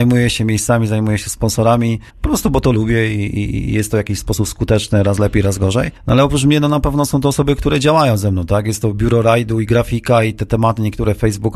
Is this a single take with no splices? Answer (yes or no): no